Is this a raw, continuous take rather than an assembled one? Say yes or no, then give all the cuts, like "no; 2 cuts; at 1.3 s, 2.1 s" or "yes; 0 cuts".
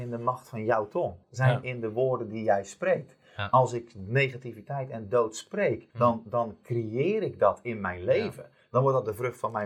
no; 2 cuts; at 1.2 s, 5.9 s